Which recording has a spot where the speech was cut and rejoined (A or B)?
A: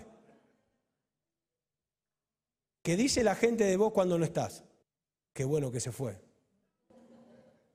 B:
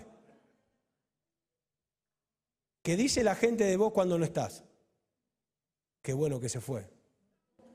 A